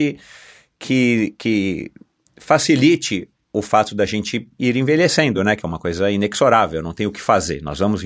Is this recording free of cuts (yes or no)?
yes